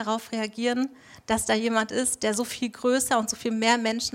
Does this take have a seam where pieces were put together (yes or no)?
no